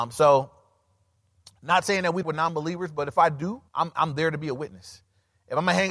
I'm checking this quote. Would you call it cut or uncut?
cut